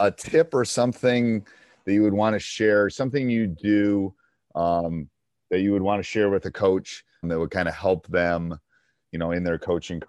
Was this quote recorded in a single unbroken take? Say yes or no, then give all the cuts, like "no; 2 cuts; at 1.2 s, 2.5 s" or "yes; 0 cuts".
no; 1 cut; at 7.2 s